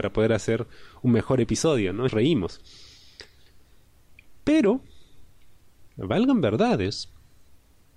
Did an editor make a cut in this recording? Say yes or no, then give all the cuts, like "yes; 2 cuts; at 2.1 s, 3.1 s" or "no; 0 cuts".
yes; 2 cuts; at 2.1 s, 5.9 s